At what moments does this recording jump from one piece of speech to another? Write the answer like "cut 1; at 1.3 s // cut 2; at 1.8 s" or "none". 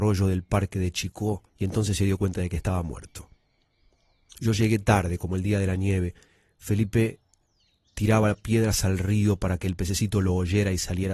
cut 1; at 1.5 s